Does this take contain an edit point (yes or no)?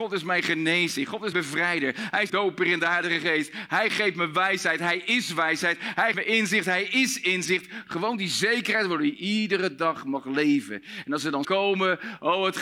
yes